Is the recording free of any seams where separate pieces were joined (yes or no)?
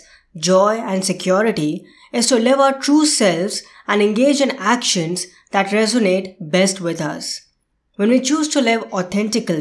yes